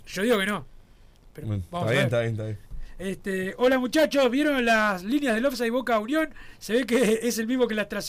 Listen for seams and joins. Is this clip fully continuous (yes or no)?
no